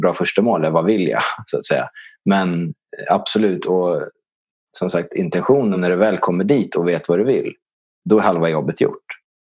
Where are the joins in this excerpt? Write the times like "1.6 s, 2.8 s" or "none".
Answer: none

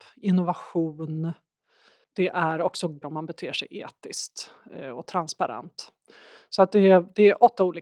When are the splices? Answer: 3.0 s

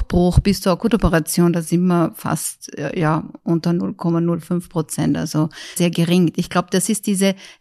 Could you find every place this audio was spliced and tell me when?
5.8 s

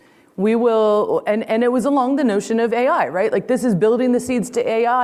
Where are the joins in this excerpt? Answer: none

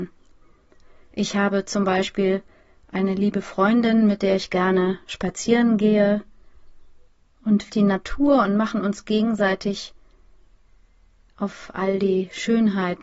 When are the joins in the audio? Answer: 7.7 s

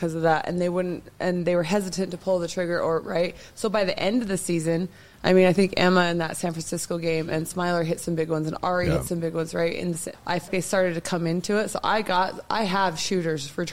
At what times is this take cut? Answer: 10.1 s, 10.5 s

